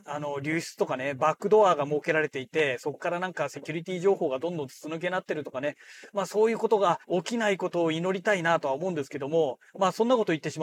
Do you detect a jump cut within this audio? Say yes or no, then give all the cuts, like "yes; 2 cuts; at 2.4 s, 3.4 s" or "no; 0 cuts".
yes; 2 cuts; at 7.0 s, 9.7 s